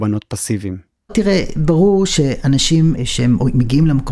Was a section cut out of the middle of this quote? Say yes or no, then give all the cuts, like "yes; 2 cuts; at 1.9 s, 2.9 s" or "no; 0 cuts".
yes; 1 cut; at 3.0 s